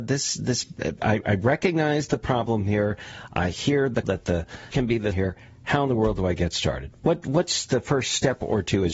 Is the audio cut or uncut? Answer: cut